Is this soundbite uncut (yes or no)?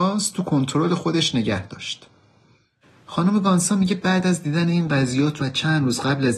no